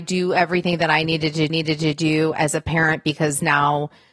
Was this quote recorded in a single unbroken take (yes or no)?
no